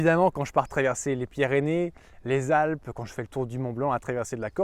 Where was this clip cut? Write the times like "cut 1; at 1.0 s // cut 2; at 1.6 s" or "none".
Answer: none